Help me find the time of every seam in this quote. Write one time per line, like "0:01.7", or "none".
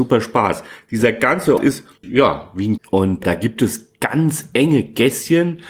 0:01.6
0:02.0
0:02.8
0:03.2